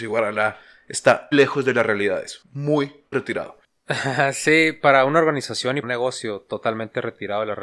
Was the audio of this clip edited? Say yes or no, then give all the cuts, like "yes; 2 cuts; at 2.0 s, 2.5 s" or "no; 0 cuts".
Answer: yes; 3 cuts; at 1.3 s, 3.1 s, 5.8 s